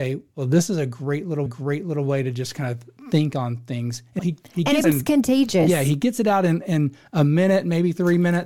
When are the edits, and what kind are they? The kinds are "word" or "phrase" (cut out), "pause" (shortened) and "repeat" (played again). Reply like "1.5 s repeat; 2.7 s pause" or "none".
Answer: 1.5 s repeat; 4.2 s word; 4.8 s phrase